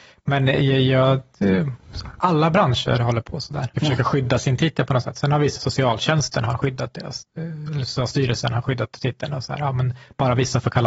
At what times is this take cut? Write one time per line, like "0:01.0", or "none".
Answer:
0:03.7
0:05.6
0:07.3